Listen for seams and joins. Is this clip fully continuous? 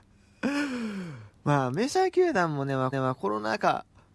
no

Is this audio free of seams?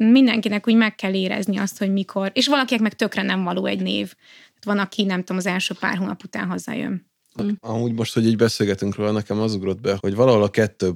no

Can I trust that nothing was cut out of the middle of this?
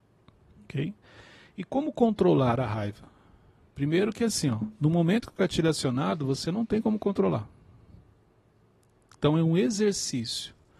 yes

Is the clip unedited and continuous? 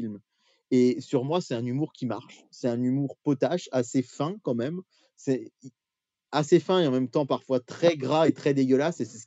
yes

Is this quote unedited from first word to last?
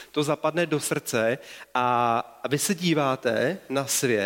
yes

